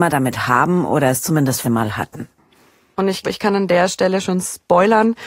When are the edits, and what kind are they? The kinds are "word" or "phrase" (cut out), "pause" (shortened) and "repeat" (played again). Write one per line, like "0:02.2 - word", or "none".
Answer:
0:01.6 - word
0:03.2 - word